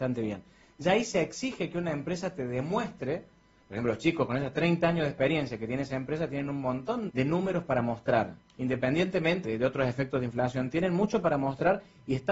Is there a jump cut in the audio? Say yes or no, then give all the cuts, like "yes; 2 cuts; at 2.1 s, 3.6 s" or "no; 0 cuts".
yes; 2 cuts; at 7.1 s, 9.4 s